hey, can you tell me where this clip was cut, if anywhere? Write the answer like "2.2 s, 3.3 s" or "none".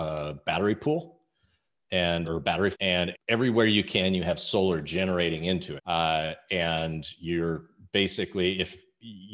2.2 s, 2.7 s, 3.1 s, 5.8 s